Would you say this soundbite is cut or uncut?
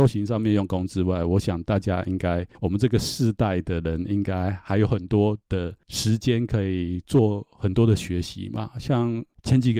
cut